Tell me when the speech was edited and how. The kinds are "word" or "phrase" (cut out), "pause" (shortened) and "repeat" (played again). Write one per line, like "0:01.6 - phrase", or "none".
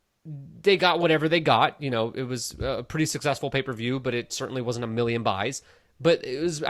none